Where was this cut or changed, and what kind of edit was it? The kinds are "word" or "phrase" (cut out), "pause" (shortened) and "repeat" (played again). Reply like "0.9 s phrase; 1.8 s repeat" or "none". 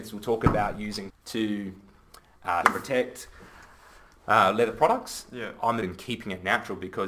1.1 s word; 2.6 s word; 5.8 s phrase

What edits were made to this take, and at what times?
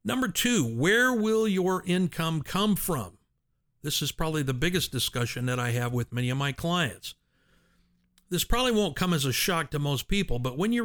none

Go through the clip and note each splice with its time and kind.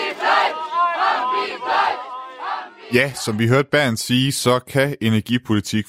none

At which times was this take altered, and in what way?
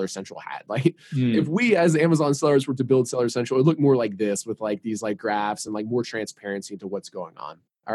none

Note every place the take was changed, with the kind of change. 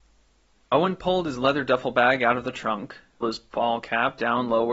3.2 s word

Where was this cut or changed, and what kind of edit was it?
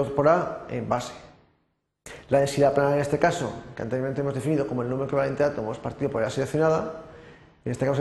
none

